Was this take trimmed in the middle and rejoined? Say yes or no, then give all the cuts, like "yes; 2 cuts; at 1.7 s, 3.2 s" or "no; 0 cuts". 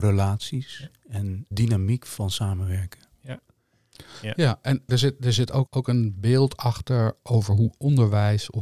yes; 3 cuts; at 1.5 s, 4.9 s, 5.7 s